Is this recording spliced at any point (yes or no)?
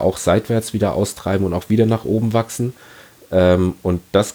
no